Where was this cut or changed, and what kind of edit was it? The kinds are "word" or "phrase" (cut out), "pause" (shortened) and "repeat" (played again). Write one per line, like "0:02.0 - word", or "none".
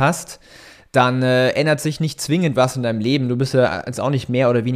none